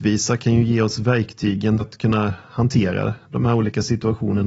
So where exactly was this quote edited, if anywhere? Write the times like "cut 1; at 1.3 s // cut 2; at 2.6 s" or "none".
cut 1; at 1.8 s